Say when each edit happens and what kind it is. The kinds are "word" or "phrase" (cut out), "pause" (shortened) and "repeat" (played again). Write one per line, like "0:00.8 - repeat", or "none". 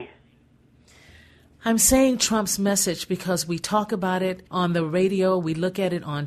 0:04.5 - pause